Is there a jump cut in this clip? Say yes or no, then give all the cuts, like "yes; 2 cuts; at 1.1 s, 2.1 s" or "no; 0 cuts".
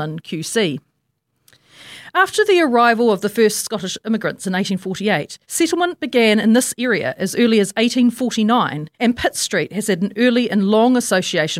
yes; 2 cuts; at 5.4 s, 8.9 s